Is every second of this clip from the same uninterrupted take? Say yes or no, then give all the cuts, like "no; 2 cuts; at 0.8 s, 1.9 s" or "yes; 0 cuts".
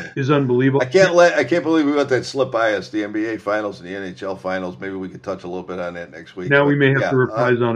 yes; 0 cuts